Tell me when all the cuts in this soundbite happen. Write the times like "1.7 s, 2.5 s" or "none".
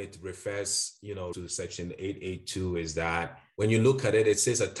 1.3 s